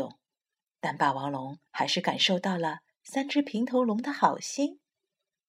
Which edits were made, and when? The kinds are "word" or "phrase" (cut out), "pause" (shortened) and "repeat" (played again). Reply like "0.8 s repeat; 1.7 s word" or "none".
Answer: 1.7 s pause